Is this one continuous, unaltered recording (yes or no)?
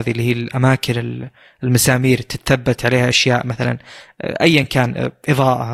yes